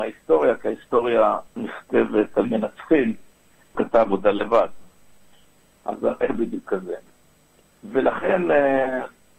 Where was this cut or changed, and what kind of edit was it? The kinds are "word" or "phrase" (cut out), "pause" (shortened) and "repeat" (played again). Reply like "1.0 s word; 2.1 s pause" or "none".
1.5 s pause; 2.4 s word; 3.7 s word; 6.2 s phrase

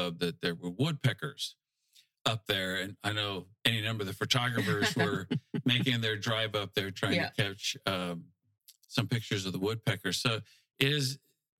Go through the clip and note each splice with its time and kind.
3.6 s pause

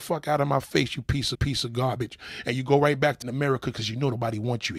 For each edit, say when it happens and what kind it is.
1.3 s repeat; 3.2 s word

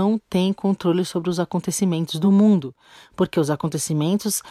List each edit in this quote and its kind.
none

